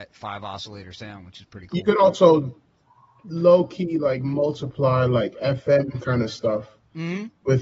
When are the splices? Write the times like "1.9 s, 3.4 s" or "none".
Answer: none